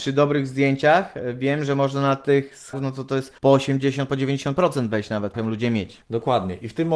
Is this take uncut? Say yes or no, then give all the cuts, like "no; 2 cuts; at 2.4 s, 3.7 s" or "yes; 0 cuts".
no; 4 cuts; at 2.7 s, 3.4 s, 5.3 s, 6.0 s